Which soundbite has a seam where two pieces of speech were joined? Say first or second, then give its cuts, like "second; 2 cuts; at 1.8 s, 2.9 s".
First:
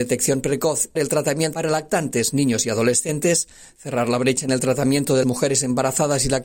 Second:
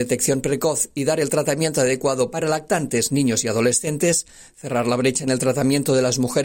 first; 3 cuts; at 1.0 s, 1.5 s, 5.2 s